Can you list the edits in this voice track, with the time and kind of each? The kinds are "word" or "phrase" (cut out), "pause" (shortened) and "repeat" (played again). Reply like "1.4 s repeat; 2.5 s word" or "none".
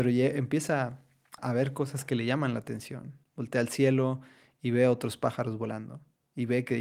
1.4 s word